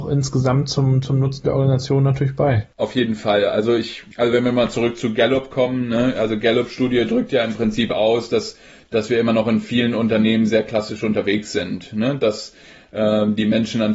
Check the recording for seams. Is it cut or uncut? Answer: uncut